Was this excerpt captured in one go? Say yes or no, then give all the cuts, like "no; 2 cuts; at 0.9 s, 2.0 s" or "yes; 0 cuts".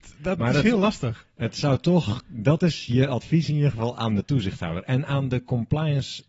yes; 0 cuts